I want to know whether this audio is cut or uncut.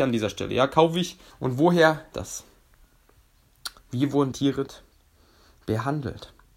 cut